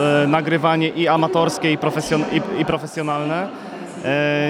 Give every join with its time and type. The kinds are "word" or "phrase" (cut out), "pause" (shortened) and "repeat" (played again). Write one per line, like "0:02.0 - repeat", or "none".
none